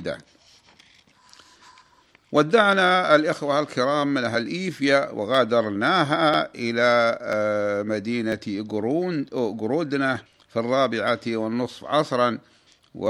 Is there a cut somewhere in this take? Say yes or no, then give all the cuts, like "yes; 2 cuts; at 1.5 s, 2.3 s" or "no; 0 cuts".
yes; 1 cut; at 10.3 s